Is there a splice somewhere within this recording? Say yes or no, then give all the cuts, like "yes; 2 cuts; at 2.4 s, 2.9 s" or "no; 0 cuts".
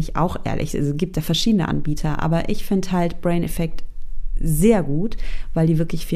no; 0 cuts